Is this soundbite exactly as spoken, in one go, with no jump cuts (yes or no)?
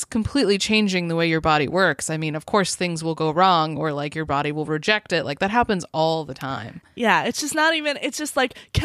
yes